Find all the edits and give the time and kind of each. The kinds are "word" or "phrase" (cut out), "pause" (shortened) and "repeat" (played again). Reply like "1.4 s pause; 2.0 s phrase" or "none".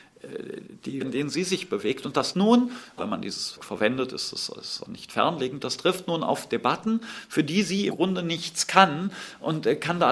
1.0 s word; 2.3 s word; 3.0 s word; 3.6 s word; 4.8 s word; 7.9 s word